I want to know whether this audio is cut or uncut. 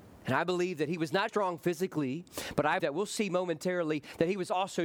cut